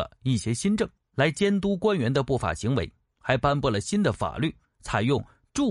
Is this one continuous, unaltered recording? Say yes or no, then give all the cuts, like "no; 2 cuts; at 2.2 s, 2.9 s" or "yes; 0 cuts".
yes; 0 cuts